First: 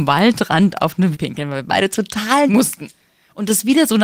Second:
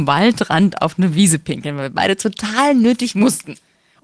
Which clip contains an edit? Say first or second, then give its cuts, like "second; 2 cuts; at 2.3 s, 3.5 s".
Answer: first; 2 cuts; at 1.1 s, 2.5 s